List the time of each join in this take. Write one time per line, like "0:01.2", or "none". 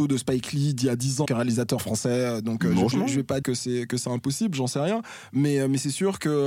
0:01.2
0:01.8
0:02.9
0:03.4